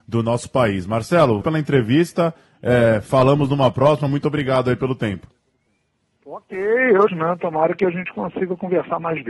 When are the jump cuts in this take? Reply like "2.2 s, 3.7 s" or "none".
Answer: 1.4 s, 7.1 s